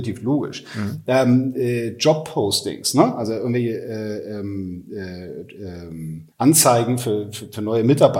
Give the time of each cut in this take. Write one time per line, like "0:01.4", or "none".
0:06.3

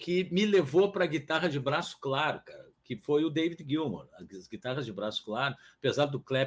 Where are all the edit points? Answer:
0:02.8

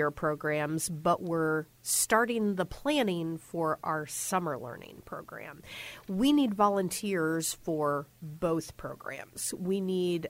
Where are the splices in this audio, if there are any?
none

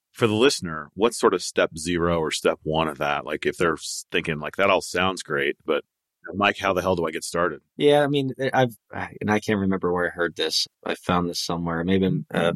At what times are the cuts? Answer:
0:07.7
0:10.7

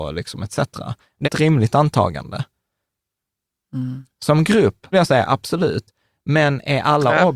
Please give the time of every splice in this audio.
0:01.2
0:04.9

